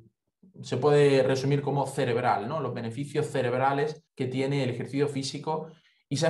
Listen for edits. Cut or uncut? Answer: cut